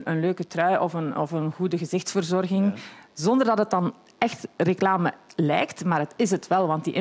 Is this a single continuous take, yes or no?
yes